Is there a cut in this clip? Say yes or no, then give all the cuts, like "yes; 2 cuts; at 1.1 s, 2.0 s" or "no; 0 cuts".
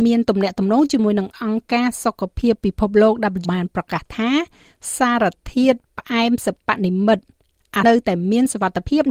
yes; 2 cuts; at 3.4 s, 7.8 s